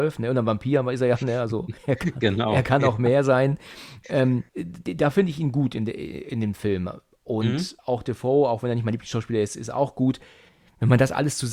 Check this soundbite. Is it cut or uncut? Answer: cut